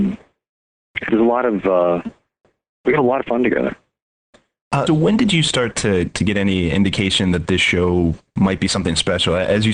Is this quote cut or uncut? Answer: cut